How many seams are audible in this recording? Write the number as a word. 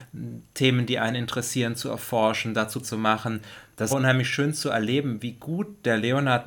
two